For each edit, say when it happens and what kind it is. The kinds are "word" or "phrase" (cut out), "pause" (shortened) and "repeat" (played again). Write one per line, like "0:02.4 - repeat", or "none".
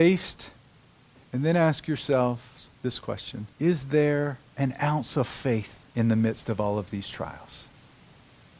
0:02.7 - pause
0:03.5 - pause
0:04.5 - pause
0:05.9 - pause